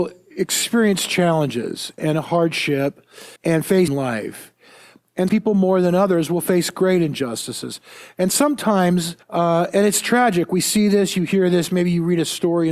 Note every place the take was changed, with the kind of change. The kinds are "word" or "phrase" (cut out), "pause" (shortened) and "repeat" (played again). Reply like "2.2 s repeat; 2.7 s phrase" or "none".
2.0 s word; 3.4 s pause; 3.9 s phrase; 5.3 s word; 9.2 s pause